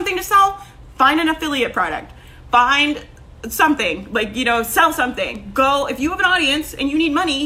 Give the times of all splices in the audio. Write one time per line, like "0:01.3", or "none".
0:03.4